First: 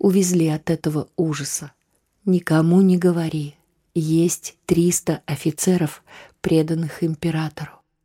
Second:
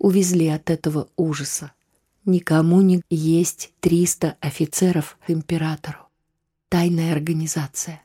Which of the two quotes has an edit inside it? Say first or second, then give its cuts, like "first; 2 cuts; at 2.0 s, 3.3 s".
second; 2 cuts; at 3.0 s, 5.3 s